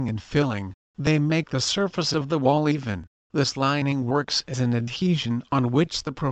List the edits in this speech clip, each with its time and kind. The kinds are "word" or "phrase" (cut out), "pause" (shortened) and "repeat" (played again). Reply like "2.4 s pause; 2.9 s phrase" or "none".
3.1 s pause